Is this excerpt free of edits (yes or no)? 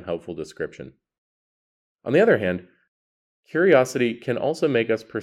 yes